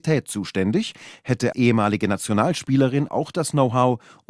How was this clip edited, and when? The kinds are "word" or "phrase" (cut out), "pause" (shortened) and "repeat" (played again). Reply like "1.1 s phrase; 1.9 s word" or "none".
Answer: 1.5 s word; 3.1 s word